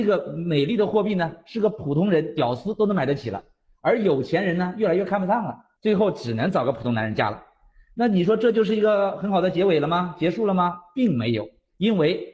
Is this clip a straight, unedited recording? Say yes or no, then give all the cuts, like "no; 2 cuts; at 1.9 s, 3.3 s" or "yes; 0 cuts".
no; 1 cut; at 5.8 s